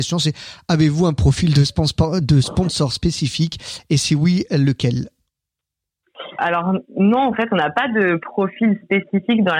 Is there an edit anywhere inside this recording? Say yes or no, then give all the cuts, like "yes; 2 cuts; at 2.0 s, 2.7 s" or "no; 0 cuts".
yes; 1 cut; at 6.4 s